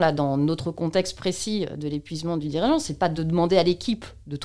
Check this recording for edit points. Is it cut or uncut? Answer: uncut